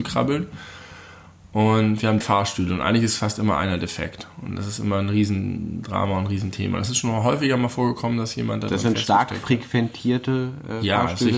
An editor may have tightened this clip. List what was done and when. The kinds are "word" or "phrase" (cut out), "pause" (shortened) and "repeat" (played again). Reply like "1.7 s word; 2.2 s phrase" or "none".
2.2 s word